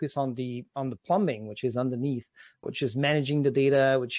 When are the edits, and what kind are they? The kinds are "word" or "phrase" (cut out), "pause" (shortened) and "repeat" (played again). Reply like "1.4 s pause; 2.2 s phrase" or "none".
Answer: 2.6 s word